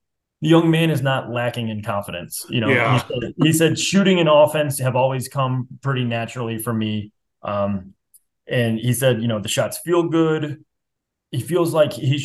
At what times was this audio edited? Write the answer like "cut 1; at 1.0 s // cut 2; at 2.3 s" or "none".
none